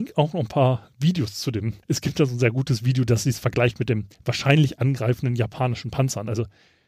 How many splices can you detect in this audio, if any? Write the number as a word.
two